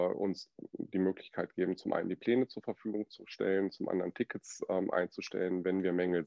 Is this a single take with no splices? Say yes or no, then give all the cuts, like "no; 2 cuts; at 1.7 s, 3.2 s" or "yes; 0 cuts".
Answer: yes; 0 cuts